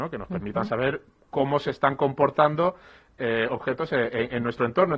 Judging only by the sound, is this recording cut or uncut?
uncut